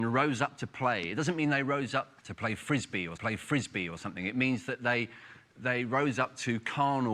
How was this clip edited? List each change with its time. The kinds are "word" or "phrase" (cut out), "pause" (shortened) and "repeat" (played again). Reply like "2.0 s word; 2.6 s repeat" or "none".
2.2 s pause; 3.2 s repeat